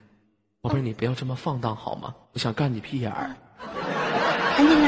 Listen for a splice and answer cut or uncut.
cut